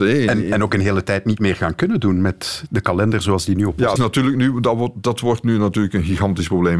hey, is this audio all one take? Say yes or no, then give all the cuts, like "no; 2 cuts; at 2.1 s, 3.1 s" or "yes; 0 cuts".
no; 1 cut; at 4.0 s